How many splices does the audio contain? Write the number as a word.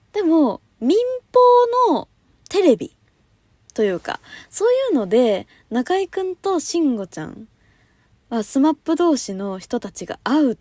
zero